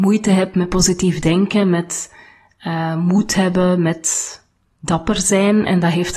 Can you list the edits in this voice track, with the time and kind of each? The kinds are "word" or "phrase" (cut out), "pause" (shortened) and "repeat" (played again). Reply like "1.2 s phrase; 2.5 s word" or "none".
none